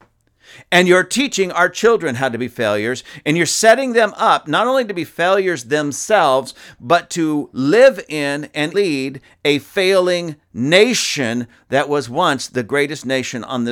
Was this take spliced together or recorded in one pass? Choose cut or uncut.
cut